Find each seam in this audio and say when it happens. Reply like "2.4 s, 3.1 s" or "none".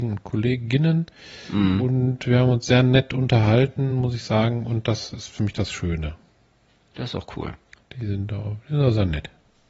none